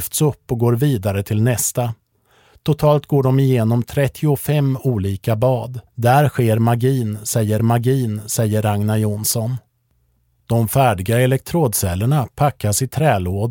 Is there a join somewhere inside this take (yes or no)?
yes